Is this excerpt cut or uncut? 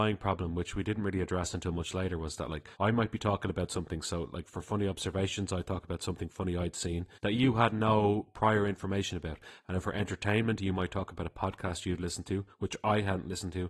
cut